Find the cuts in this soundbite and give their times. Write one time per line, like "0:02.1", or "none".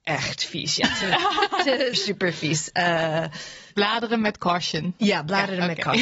0:01.9
0:03.7

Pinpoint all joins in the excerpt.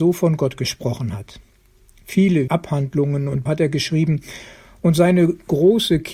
0:02.5
0:03.5

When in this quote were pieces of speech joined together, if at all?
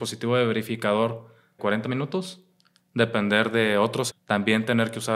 0:01.6
0:04.1

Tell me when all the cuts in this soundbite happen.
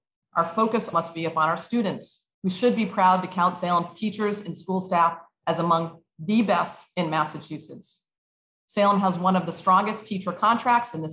0:00.9
0:02.3

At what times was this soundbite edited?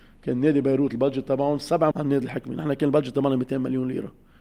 0:01.9

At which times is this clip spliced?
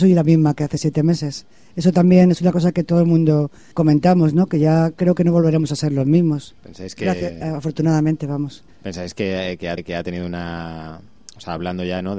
0:03.7
0:06.6
0:08.7
0:09.8

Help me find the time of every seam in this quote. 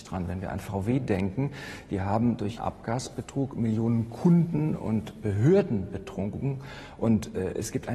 0:02.6

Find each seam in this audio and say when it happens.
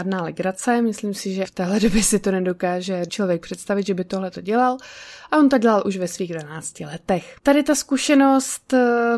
0:01.4
0:03.1
0:07.4

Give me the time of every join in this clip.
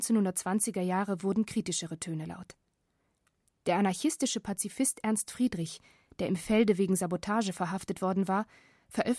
none

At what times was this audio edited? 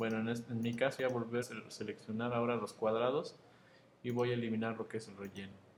0:01.0
0:01.4

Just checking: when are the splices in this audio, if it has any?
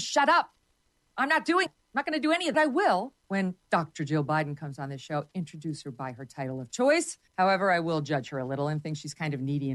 0:01.7
0:02.5
0:03.2
0:07.3

